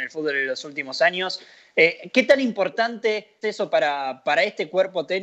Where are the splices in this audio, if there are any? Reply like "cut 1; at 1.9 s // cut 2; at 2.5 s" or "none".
cut 1; at 3.4 s